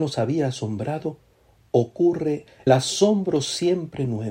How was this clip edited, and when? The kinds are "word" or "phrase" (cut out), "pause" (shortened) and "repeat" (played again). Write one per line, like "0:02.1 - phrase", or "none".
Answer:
0:02.7 - word

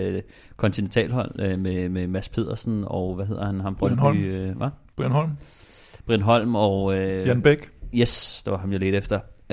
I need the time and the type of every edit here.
none

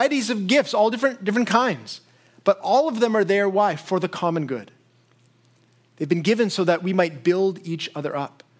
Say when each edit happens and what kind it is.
none

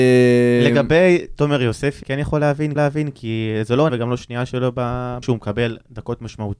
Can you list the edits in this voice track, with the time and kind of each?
0:02.0 - word
0:02.8 - repeat
0:03.9 - word
0:05.2 - word

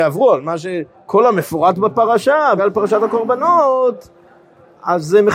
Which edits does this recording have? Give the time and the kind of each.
0:00.9 - pause
0:02.6 - word

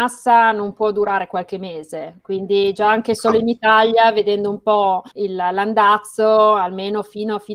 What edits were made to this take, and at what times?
0:05.1 - pause

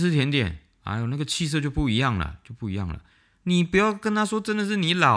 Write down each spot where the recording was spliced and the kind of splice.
0:03.1 - pause

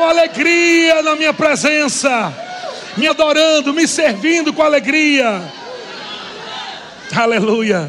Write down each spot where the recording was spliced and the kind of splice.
none

